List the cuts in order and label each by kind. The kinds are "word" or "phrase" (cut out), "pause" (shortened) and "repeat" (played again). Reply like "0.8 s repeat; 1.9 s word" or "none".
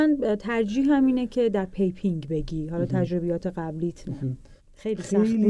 none